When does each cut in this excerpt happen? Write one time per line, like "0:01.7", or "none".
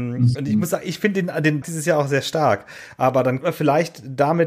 0:01.6
0:03.4